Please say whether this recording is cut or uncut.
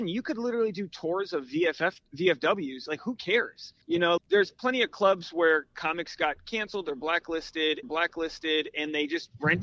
cut